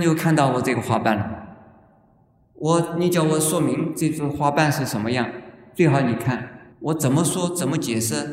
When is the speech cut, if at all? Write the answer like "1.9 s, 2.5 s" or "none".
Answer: 6.7 s